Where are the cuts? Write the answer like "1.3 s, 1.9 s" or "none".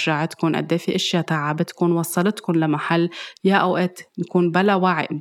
none